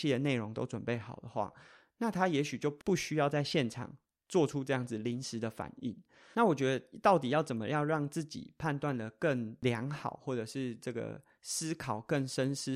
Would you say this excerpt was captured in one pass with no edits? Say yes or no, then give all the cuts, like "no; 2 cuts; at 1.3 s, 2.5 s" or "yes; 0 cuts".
yes; 0 cuts